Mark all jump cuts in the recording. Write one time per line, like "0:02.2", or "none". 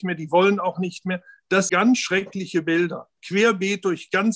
0:01.7